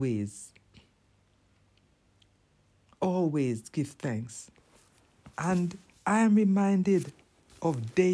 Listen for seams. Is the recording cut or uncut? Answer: uncut